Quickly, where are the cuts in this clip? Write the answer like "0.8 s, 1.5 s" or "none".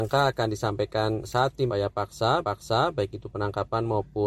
1.2 s, 1.7 s, 2.4 s